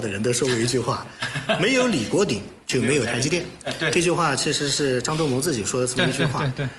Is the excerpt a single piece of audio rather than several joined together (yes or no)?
no